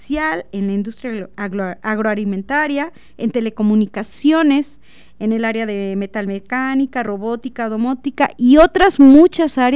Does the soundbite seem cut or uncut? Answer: uncut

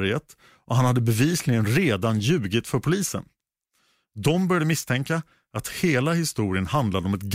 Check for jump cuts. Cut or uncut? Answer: uncut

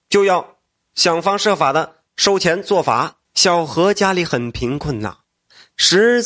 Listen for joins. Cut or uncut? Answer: cut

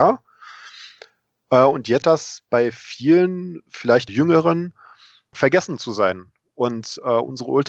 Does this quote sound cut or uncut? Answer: cut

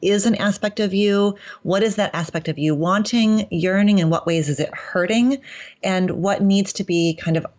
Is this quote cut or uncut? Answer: uncut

